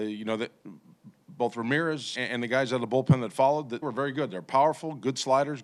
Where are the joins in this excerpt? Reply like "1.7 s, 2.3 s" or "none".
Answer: 2.1 s, 3.8 s